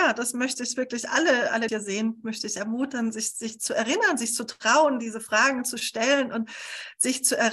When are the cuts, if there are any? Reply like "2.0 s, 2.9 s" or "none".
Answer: 1.7 s